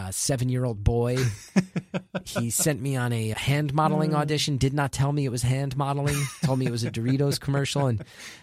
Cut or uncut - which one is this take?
cut